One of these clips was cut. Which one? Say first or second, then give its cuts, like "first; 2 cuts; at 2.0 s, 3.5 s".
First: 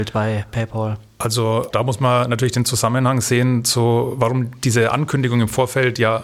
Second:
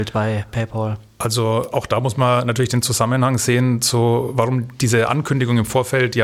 first; 1 cut; at 1.7 s